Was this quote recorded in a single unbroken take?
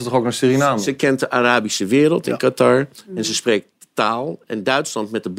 yes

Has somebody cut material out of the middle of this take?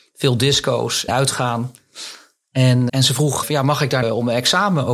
yes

